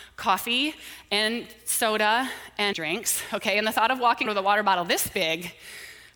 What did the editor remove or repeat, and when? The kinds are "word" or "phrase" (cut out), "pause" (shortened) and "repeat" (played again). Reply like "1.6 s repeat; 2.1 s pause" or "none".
2.7 s word; 4.3 s word